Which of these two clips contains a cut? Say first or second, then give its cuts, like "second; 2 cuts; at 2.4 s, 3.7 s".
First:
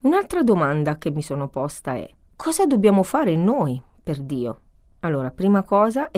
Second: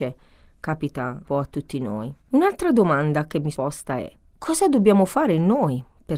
second; 3 cuts; at 1.2 s, 2.2 s, 3.5 s